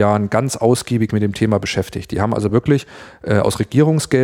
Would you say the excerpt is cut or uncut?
uncut